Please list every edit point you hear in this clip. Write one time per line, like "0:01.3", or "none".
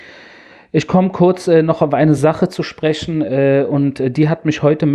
none

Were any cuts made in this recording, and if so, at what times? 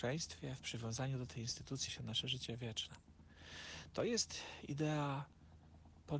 0:01.9

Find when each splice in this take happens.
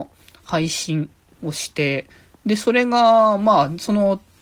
none

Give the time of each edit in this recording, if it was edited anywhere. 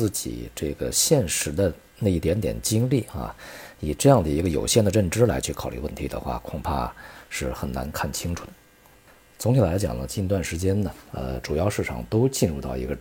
none

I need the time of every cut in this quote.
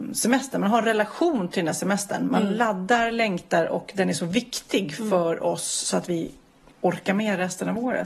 none

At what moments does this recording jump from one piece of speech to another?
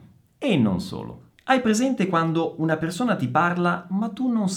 none

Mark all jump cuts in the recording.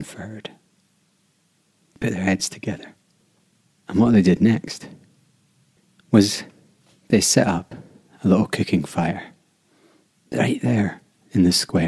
none

